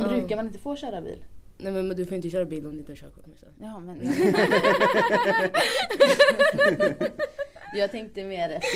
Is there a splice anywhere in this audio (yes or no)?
no